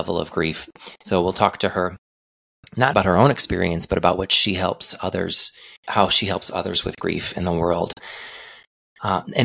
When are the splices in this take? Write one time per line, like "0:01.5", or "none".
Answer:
0:02.9
0:05.8